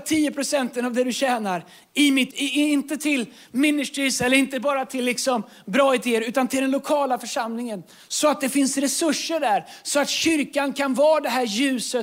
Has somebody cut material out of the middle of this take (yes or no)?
yes